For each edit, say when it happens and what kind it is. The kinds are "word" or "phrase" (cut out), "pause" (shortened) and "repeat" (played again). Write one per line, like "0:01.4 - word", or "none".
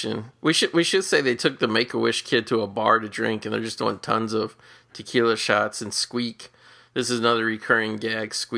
none